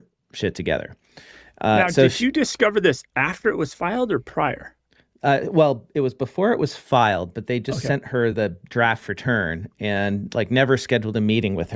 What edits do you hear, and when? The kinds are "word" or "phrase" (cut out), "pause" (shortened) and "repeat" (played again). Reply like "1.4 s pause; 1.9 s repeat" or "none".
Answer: none